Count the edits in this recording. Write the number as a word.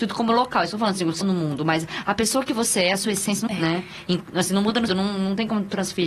three